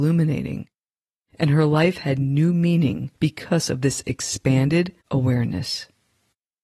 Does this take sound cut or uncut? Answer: cut